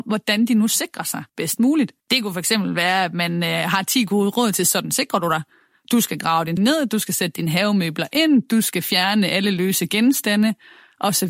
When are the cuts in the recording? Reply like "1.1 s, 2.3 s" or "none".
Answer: 1.3 s, 2.0 s, 6.6 s